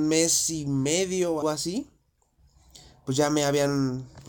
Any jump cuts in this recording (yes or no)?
yes